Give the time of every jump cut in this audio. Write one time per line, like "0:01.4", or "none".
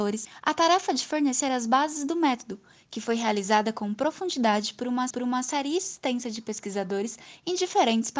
0:05.1